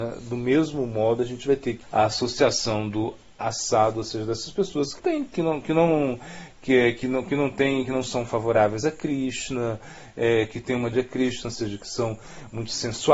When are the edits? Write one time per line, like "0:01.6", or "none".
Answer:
0:01.8
0:05.0
0:10.9